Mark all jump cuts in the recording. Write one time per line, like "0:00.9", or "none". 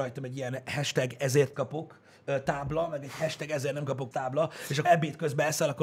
0:01.5
0:04.1
0:04.8